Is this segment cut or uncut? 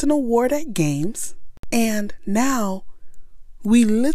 uncut